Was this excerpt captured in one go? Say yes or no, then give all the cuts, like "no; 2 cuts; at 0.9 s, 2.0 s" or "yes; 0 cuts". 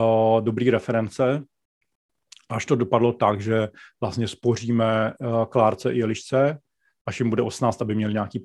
yes; 0 cuts